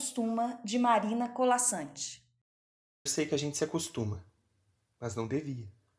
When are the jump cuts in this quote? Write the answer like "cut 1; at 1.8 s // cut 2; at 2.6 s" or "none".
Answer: cut 1; at 3.1 s